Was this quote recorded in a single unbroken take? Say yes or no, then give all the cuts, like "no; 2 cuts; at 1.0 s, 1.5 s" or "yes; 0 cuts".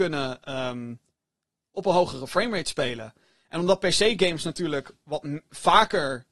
yes; 0 cuts